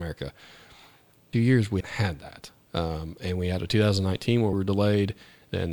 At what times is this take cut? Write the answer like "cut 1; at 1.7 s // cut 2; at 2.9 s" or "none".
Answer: cut 1; at 1.3 s // cut 2; at 1.8 s // cut 3; at 2.6 s // cut 4; at 4.5 s